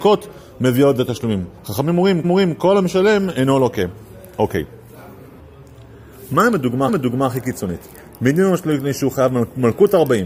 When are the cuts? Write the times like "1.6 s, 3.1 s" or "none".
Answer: 1.6 s, 2.2 s, 6.9 s